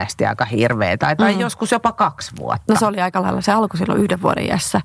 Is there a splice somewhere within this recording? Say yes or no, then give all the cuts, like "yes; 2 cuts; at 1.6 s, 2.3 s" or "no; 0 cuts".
no; 0 cuts